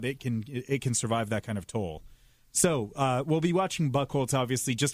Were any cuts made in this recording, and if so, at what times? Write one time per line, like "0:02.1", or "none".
none